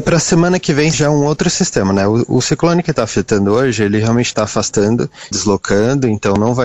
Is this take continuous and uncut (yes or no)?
no